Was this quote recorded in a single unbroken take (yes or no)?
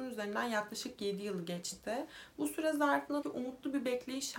no